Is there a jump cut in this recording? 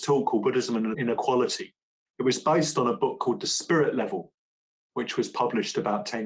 no; 0 cuts

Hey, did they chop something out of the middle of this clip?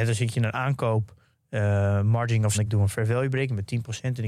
yes; 1 cut; at 2.5 s

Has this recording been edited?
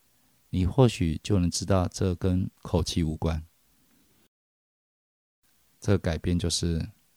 yes; 1 cut; at 2.6 s

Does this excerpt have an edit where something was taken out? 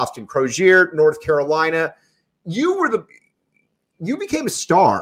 no; 0 cuts

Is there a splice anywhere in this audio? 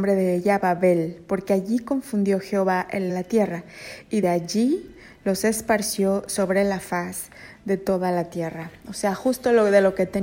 yes; 2 cuts; at 3.1 s, 4.2 s

